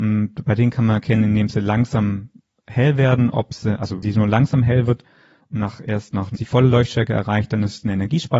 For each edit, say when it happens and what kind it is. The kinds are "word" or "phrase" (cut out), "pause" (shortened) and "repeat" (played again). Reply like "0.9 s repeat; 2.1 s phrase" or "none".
4.0 s word; 6.4 s phrase